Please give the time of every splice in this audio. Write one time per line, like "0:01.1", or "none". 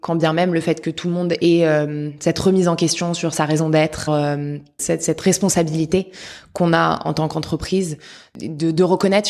0:04.1